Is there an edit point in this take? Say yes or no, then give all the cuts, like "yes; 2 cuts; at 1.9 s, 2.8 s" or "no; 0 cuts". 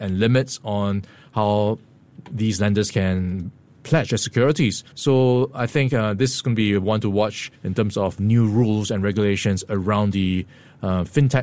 yes; 2 cuts; at 4.9 s, 7.5 s